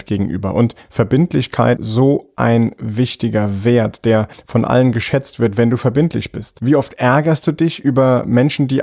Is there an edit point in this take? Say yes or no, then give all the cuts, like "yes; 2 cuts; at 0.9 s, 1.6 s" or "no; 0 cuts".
yes; 1 cut; at 1.8 s